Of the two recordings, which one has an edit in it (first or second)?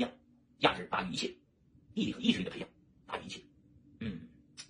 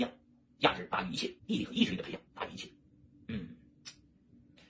second